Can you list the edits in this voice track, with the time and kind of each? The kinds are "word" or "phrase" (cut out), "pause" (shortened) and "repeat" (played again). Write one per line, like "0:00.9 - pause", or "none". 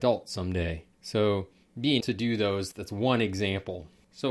0:00.9 - pause
0:02.0 - word
0:02.7 - word